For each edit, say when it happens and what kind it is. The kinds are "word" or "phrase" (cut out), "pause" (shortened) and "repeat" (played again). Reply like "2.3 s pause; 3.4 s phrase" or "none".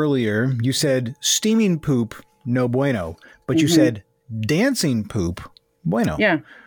none

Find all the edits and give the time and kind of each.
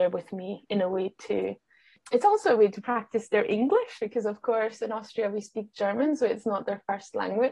none

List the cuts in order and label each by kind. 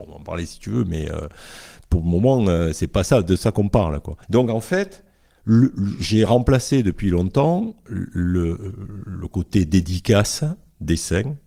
4.2 s pause

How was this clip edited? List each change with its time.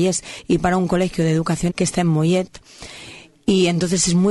1.7 s word

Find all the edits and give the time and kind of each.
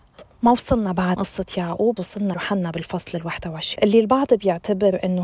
1.2 s word; 2.0 s word; 2.3 s phrase; 3.8 s word

